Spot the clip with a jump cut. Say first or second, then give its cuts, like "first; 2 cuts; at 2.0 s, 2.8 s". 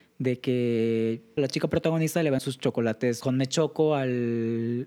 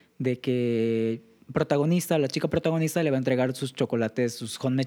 first; 3 cuts; at 1.4 s, 2.4 s, 3.2 s